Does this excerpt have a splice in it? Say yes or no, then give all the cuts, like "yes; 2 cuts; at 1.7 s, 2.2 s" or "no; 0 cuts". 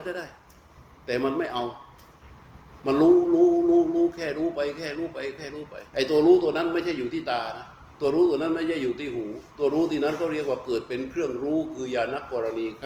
yes; 3 cuts; at 5.9 s, 7.9 s, 9.5 s